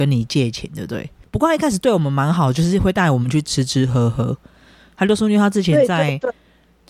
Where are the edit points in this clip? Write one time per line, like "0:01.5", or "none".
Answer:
0:01.2